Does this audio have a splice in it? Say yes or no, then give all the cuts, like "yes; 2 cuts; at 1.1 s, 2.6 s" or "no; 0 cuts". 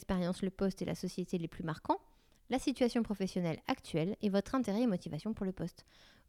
no; 0 cuts